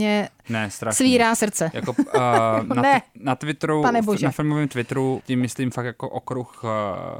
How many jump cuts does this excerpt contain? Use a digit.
1